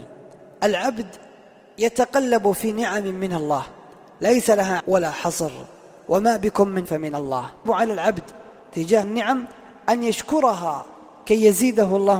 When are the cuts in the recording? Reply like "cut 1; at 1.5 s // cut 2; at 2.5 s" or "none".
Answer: cut 1; at 4.8 s // cut 2; at 6.9 s // cut 3; at 7.7 s // cut 4; at 9.0 s